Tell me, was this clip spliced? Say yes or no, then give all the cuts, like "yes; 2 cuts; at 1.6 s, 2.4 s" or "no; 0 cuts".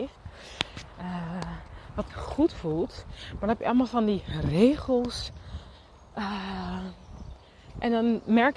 yes; 1 cut; at 2.1 s